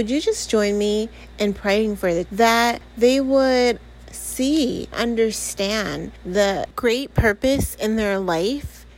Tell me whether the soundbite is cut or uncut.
cut